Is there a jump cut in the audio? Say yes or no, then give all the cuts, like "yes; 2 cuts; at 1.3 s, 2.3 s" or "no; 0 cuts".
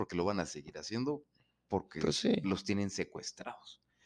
no; 0 cuts